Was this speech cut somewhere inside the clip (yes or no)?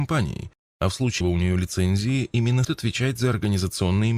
yes